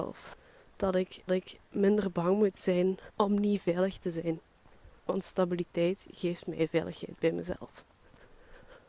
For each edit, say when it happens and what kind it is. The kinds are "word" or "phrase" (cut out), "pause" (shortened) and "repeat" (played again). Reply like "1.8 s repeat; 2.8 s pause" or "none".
1.3 s repeat